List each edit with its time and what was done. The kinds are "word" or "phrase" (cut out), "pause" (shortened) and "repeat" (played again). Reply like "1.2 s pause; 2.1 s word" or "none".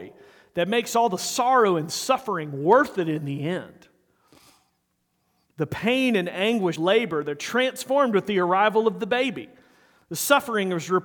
6.8 s word